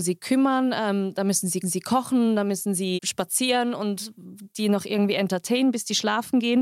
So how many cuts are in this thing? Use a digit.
2